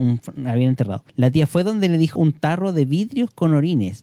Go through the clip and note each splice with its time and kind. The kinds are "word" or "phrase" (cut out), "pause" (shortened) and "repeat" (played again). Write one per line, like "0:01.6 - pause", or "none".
0:01.1 - pause
0:02.2 - phrase